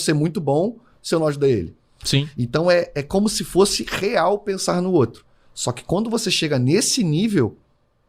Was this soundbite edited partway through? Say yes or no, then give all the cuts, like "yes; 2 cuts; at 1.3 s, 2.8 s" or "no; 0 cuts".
no; 0 cuts